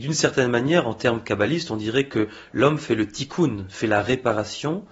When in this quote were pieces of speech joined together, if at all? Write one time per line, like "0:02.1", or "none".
none